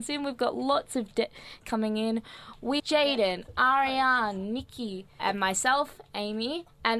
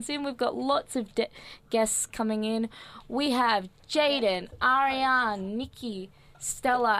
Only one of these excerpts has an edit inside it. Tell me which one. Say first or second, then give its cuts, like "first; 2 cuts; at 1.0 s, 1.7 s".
first; 3 cuts; at 1.6 s, 2.8 s, 5.2 s